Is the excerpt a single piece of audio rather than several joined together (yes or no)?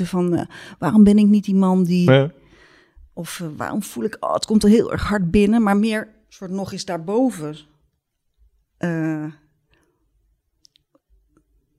yes